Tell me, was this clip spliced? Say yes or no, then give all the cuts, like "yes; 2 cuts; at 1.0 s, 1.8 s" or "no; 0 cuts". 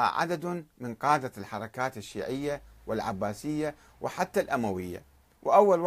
no; 0 cuts